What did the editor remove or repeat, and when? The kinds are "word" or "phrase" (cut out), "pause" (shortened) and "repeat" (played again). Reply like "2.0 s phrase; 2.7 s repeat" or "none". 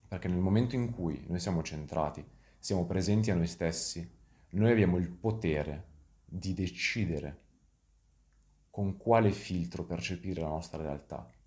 none